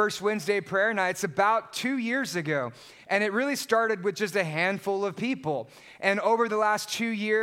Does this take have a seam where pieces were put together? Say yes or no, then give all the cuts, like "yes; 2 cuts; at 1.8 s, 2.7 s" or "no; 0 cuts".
no; 0 cuts